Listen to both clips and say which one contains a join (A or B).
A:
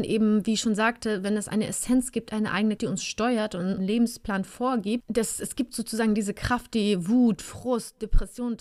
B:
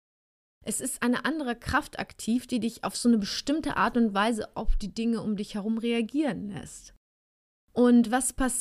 A